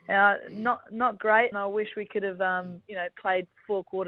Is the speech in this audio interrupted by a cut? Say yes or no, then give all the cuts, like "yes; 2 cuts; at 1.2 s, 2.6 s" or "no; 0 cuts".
yes; 1 cut; at 1.5 s